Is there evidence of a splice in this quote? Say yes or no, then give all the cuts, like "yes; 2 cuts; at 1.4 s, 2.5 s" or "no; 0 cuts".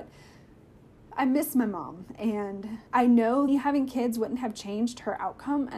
yes; 2 cuts; at 2.9 s, 3.5 s